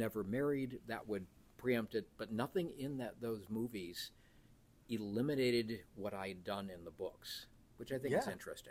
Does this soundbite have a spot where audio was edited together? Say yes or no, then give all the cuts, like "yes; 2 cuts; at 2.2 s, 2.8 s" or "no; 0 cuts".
no; 0 cuts